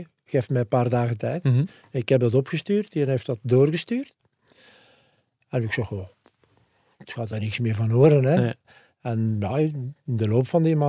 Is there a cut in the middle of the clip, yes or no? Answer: no